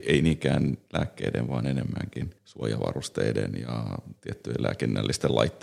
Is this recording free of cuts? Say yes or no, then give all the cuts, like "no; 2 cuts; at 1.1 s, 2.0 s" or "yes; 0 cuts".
no; 1 cut; at 2.4 s